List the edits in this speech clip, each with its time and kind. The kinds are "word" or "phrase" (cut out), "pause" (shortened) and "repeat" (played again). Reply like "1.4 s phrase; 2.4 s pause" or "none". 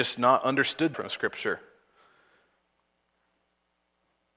0.9 s word